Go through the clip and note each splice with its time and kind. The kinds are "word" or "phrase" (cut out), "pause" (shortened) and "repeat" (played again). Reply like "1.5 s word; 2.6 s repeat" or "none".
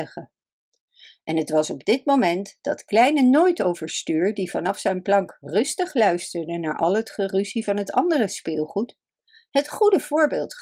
none